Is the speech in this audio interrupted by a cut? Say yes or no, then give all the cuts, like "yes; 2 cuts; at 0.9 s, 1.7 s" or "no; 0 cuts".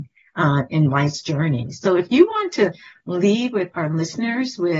no; 0 cuts